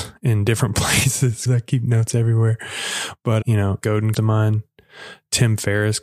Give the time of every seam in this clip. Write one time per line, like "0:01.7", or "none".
0:01.5
0:03.4
0:03.8
0:04.1